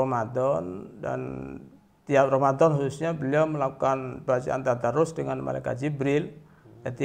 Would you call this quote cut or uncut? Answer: uncut